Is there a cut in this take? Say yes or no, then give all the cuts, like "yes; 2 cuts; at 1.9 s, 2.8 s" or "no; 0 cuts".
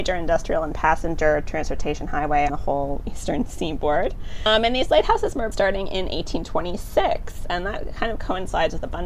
yes; 2 cuts; at 2.5 s, 5.5 s